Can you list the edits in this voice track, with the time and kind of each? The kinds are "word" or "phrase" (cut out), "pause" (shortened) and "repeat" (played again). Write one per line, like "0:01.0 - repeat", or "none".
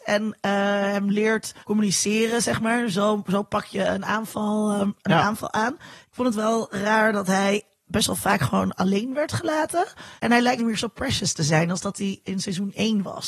0:01.6 - pause
0:07.8 - word
0:10.2 - pause
0:10.6 - word